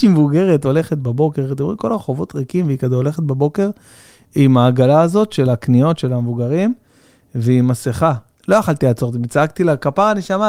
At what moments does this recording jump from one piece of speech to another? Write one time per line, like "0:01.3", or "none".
none